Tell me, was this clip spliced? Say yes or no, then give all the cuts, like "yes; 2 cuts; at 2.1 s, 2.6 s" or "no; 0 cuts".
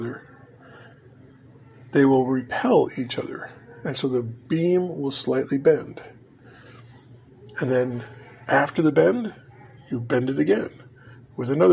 no; 0 cuts